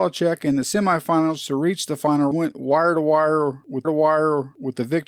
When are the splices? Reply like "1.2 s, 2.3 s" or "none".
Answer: 2.3 s, 3.8 s